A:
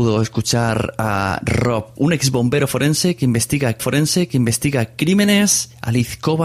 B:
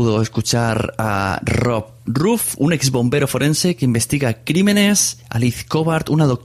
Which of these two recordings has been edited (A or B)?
A